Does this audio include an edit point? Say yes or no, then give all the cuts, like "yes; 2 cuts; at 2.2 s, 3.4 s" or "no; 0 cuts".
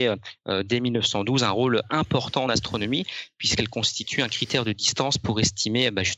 no; 0 cuts